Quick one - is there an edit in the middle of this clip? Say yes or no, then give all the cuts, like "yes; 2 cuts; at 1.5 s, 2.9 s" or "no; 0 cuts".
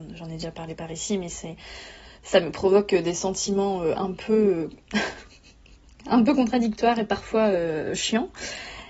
yes; 1 cut; at 2.1 s